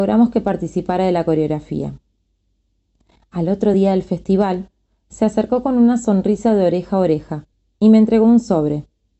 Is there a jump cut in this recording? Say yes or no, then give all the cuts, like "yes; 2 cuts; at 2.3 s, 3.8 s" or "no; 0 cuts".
no; 0 cuts